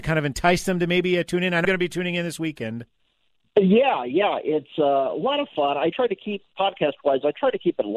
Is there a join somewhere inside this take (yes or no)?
yes